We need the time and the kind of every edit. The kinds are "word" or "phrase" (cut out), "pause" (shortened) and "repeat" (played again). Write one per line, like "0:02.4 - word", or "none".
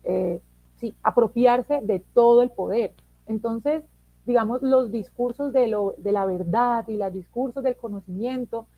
none